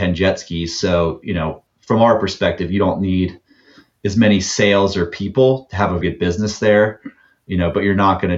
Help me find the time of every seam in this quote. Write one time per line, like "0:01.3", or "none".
0:06.0

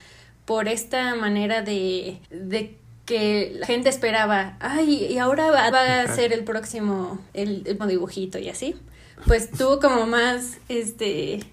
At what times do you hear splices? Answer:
0:02.2
0:03.6
0:05.7
0:07.3
0:07.8

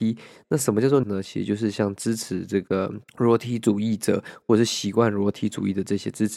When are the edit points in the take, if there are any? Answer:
0:01.0
0:03.1

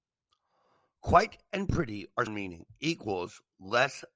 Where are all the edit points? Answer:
0:02.3

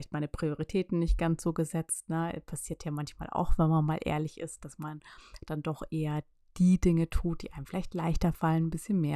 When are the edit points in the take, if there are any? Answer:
none

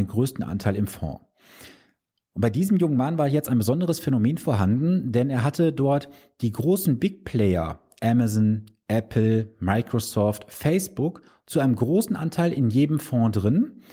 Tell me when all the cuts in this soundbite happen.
0:11.3

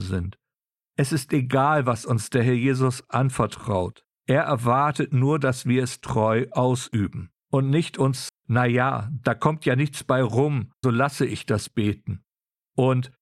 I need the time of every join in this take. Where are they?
0:04.1
0:07.4
0:08.3
0:10.8

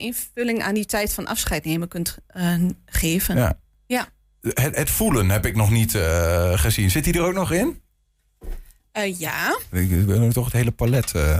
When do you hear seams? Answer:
none

